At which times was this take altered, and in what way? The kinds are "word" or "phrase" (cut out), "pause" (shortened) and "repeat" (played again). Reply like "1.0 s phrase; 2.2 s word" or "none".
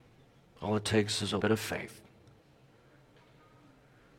1.4 s word

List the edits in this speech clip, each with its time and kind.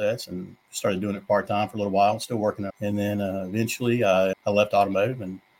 2.7 s word; 4.3 s word

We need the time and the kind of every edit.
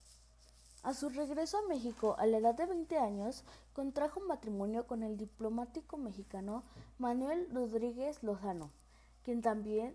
none

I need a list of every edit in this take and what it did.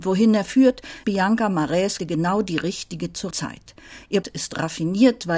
1.0 s word; 2.0 s word; 3.3 s word; 4.2 s word

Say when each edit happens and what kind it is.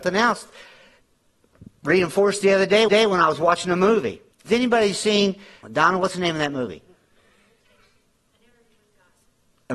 2.9 s repeat; 4.3 s pause; 5.6 s word

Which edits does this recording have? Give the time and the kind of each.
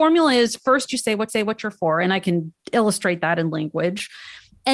1.3 s repeat; 2.6 s pause

